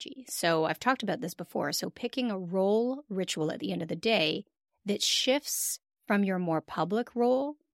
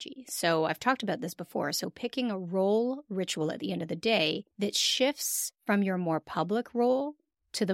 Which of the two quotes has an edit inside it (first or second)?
second